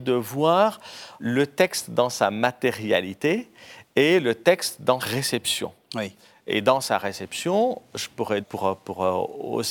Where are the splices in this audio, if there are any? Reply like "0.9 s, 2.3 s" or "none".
1.2 s, 5.0 s, 8.4 s